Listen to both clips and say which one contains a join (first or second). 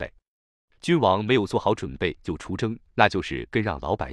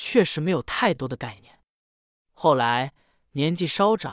first